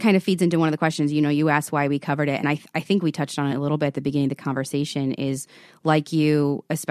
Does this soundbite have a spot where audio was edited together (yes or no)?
no